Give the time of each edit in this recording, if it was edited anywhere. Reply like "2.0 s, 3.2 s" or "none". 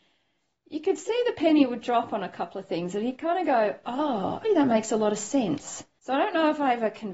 4.4 s